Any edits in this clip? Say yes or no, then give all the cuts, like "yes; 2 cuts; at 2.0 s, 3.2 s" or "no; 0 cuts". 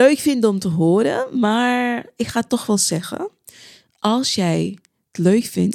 no; 0 cuts